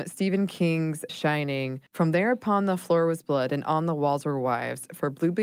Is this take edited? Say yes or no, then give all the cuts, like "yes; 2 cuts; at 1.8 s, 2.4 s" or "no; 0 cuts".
yes; 2 cuts; at 1.1 s, 1.9 s